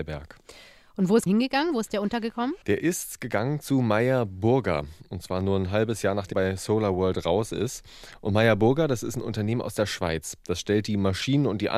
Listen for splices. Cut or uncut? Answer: cut